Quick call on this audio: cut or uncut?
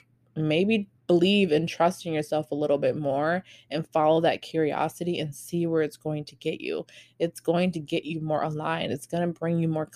cut